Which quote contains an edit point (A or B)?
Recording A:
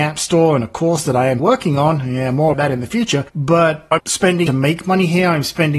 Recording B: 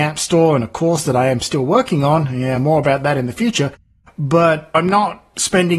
A